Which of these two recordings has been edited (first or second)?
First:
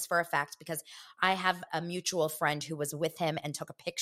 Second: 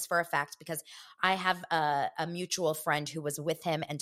first